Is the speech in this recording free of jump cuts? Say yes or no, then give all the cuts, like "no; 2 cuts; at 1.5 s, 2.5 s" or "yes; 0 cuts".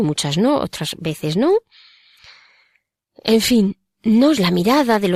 yes; 0 cuts